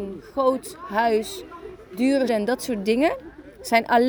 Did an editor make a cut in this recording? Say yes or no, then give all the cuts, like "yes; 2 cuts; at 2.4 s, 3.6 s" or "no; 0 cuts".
yes; 1 cut; at 2.3 s